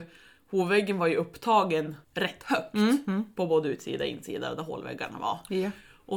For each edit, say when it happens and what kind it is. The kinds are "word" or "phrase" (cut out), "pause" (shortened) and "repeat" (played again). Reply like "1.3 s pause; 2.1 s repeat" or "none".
2.0 s pause